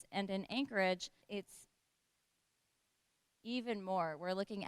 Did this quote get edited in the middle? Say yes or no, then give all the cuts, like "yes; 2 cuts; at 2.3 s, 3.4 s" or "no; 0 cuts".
yes; 1 cut; at 1.2 s